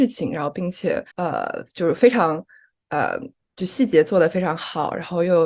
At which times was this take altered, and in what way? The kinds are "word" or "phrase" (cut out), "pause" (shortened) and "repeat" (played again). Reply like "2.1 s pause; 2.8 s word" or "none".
1.1 s pause; 3.3 s pause